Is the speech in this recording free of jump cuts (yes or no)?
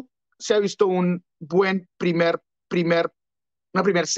no